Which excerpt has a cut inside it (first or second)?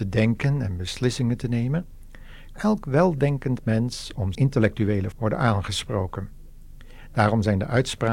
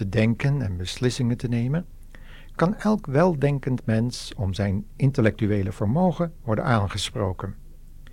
first